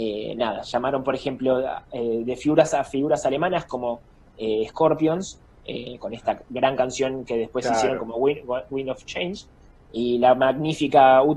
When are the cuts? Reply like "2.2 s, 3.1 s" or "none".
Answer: none